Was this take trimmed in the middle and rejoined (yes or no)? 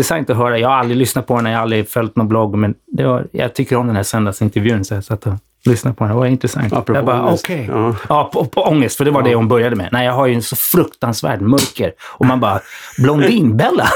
no